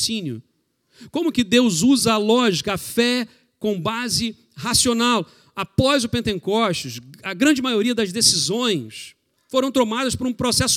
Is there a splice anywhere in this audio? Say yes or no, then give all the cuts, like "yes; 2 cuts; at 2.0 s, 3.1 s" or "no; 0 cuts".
no; 0 cuts